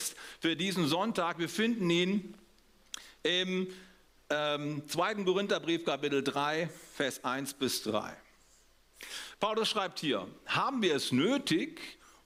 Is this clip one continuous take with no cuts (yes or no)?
yes